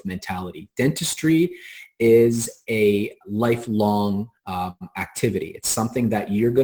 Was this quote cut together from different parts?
yes; 1 cut; at 4.4 s

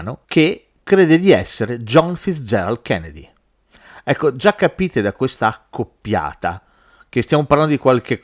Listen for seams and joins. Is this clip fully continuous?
yes; 0 cuts

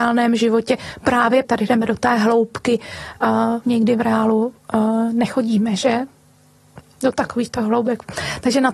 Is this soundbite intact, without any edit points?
no; 2 cuts; at 1.4 s, 3.6 s

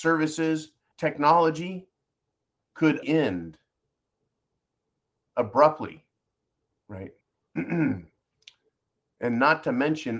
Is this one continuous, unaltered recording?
no; 3 cuts; at 0.9 s, 3.0 s, 7.2 s

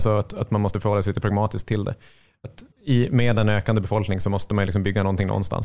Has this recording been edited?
yes; 1 cut; at 2.7 s

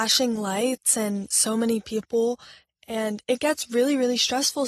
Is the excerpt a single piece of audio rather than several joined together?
yes; 0 cuts

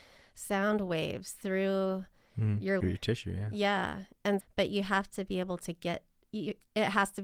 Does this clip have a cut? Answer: yes; 2 cuts; at 2.8 s, 4.4 s

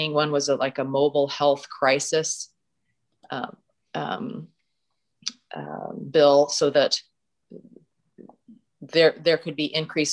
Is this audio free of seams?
yes; 0 cuts

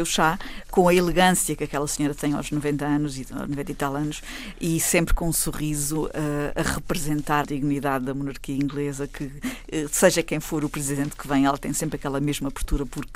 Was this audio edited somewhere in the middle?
yes; 1 cut; at 7.4 s

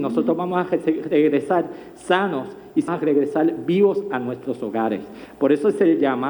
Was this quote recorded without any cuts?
no; 1 cut; at 2.9 s

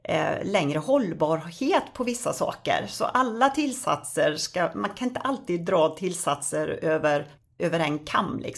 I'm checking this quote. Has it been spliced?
yes; 1 cut; at 7.6 s

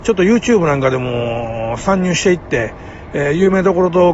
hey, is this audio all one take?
yes; 0 cuts

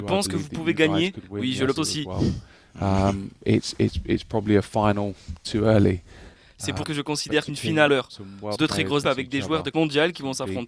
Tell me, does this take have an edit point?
yes; 7 cuts; at 1.8 s, 6.8 s, 7.5 s, 7.9 s, 8.6 s, 9.0 s, 9.7 s

